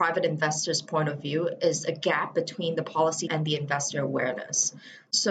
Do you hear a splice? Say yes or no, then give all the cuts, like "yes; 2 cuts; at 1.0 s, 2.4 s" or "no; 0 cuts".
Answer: yes; 1 cut; at 3.3 s